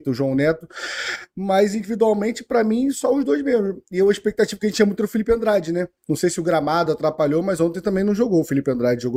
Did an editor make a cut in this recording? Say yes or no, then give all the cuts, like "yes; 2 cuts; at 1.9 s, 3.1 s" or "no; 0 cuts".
no; 0 cuts